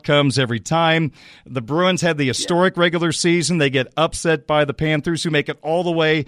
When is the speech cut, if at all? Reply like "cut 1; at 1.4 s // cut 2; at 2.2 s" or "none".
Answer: none

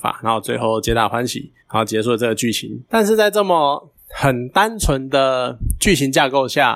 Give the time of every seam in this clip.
cut 1; at 1.6 s // cut 2; at 2.8 s // cut 3; at 4.0 s

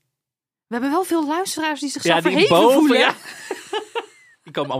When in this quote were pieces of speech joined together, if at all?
none

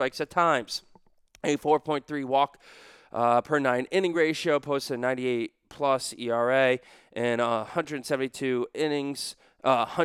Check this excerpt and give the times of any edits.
none

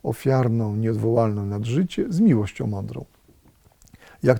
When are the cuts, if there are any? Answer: none

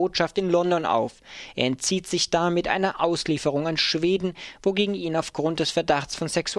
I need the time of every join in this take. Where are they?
none

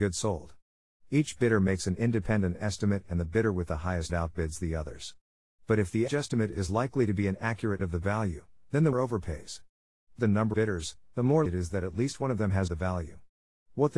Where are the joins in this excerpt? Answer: cut 1; at 4.1 s // cut 2; at 6.1 s // cut 3; at 7.8 s // cut 4; at 8.9 s // cut 5; at 10.2 s // cut 6; at 10.5 s // cut 7; at 11.5 s // cut 8; at 12.7 s

